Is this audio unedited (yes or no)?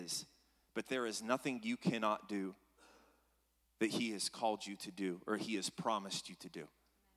yes